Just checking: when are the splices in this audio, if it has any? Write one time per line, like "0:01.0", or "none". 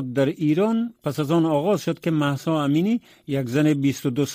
none